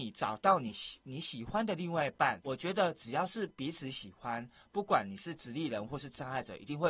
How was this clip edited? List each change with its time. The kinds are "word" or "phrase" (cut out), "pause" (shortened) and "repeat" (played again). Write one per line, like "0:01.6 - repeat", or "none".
0:02.4 - word